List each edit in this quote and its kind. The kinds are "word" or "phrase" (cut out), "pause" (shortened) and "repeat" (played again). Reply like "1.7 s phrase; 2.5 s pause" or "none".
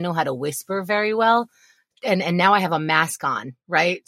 none